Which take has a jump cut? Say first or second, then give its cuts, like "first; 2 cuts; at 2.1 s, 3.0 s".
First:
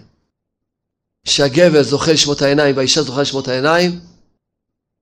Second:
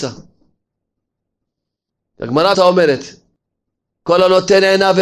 second; 1 cut; at 2.5 s